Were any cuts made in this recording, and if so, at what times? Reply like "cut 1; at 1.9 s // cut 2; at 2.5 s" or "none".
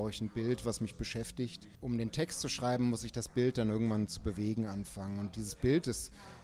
none